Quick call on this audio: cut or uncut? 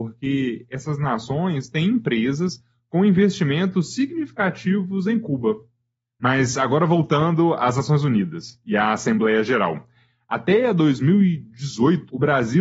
uncut